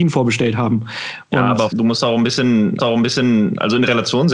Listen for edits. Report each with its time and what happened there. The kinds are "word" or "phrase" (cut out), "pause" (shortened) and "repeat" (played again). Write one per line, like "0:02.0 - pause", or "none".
0:01.7 - word
0:02.8 - repeat